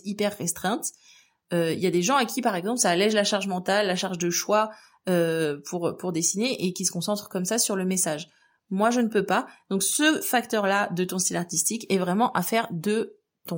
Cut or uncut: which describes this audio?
uncut